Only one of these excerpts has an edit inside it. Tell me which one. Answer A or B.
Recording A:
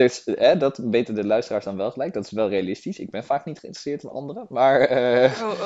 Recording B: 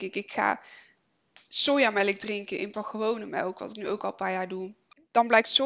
B